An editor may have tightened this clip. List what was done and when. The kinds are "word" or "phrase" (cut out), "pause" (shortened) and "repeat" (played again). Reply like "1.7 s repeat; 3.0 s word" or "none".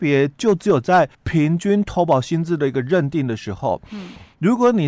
1.1 s pause

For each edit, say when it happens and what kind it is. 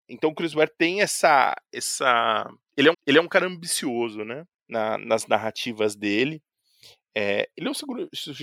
2.9 s repeat; 4.6 s pause

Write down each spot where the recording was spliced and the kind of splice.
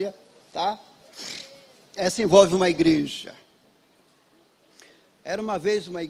none

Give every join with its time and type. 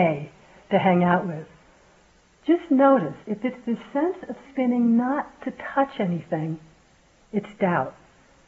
3.2 s pause; 4.4 s word; 5.4 s word

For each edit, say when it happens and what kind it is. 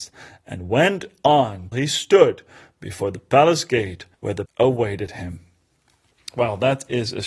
1.7 s word; 4.1 s pause; 4.5 s word

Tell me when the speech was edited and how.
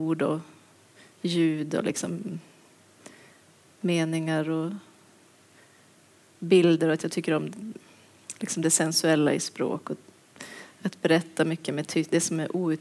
none

